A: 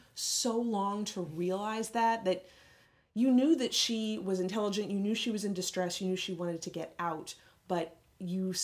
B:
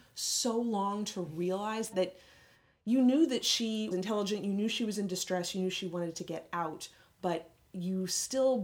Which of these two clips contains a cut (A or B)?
B